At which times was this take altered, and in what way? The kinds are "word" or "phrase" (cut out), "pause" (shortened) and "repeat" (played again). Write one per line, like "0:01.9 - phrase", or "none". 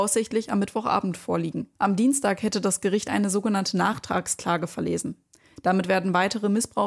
0:01.7 - pause
0:03.0 - word